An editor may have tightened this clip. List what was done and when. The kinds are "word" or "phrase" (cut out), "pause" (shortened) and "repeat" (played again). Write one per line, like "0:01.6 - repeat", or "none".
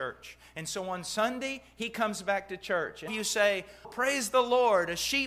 0:03.1 - phrase
0:03.8 - word